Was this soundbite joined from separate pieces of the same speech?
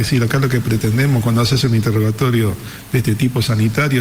no; 0 cuts

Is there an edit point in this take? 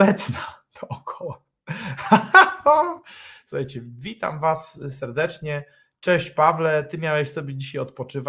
no; 0 cuts

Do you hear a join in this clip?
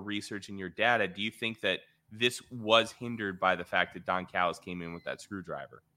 no; 0 cuts

